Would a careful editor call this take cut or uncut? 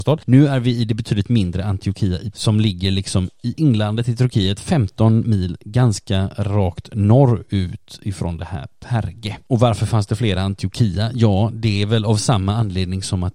cut